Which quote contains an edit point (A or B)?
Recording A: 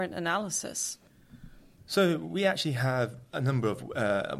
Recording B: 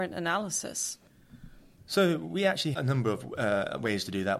B